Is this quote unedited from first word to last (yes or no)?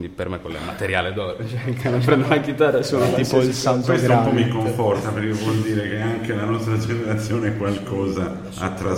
yes